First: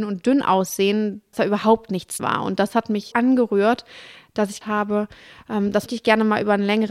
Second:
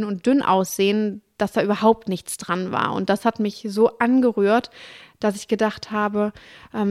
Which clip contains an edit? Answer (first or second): first